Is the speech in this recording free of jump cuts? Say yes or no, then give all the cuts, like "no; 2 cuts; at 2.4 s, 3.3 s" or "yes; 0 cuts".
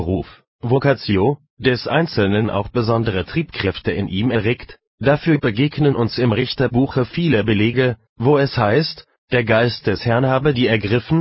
yes; 0 cuts